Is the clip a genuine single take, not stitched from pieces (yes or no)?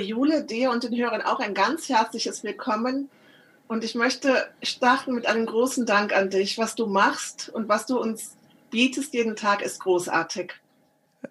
yes